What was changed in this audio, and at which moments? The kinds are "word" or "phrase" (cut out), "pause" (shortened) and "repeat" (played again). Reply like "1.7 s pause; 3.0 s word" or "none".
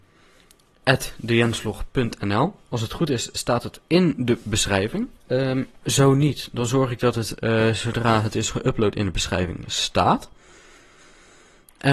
5.2 s pause; 5.8 s pause